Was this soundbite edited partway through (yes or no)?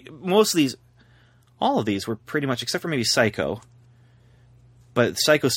no